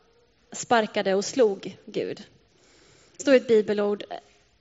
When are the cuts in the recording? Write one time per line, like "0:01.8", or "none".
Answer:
0:03.2